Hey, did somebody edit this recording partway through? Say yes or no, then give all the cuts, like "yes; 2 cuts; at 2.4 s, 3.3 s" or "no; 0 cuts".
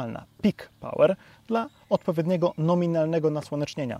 no; 0 cuts